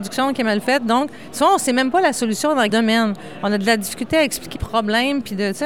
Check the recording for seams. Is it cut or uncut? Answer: cut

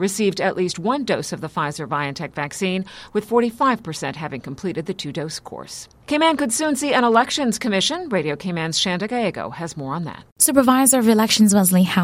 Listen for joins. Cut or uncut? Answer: cut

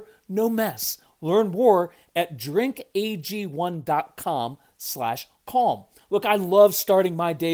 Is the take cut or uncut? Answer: uncut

